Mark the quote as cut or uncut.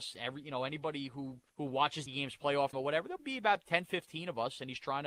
cut